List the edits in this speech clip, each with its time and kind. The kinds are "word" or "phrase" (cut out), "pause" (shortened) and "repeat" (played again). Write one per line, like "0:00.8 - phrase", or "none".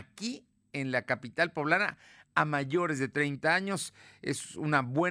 none

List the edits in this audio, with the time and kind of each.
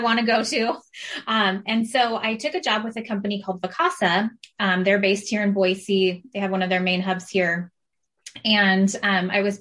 none

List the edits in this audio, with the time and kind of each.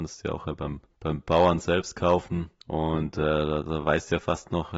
0:00.9 - pause
0:02.6 - pause

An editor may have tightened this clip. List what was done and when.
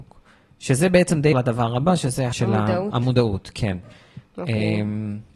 0:01.3 - word
0:02.3 - word

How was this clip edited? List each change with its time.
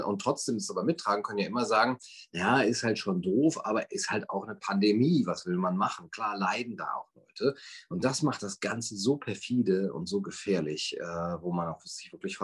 none

